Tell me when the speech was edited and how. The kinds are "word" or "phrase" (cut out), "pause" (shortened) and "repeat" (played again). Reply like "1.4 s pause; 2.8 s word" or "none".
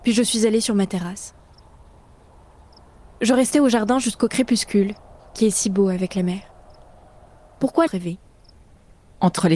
7.9 s phrase